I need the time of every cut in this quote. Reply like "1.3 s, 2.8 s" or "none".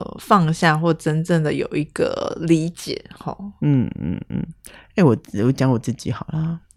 none